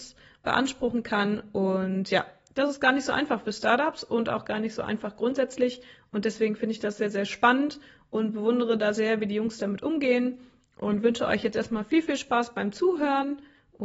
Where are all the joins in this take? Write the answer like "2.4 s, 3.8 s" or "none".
none

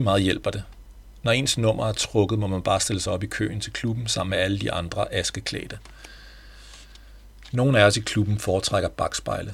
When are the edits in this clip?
none

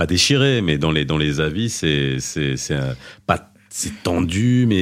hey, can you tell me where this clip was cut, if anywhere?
none

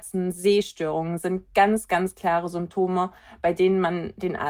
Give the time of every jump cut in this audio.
none

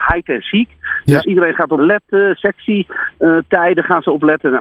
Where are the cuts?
1.2 s, 1.8 s

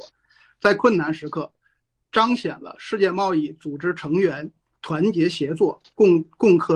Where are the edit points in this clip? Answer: none

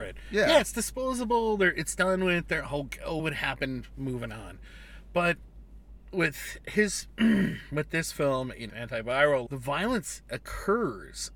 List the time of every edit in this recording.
3.2 s, 8.7 s, 9.5 s

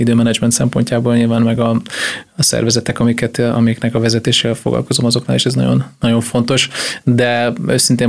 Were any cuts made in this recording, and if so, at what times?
none

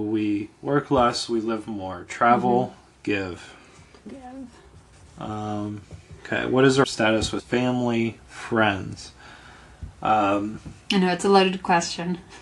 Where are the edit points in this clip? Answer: 4.1 s, 6.2 s, 6.8 s, 7.4 s, 10.8 s

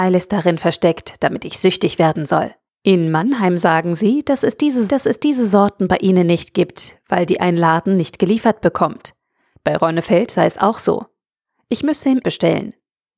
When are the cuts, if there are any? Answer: 2.7 s, 4.9 s, 12.2 s

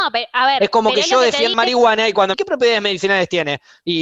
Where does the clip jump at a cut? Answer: 1.5 s, 2.3 s

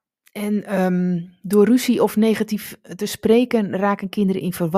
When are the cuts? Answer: none

